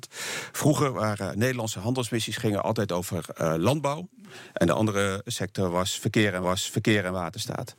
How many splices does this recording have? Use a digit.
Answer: 1